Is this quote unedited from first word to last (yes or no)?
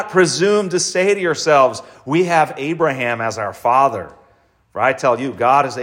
yes